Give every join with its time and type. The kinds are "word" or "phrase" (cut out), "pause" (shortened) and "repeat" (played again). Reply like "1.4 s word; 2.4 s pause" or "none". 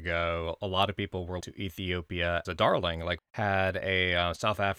1.4 s word; 2.4 s word; 3.2 s word